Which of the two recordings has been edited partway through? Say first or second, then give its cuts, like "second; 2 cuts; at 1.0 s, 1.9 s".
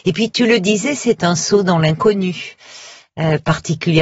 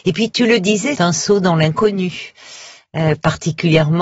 second; 1 cut; at 0.9 s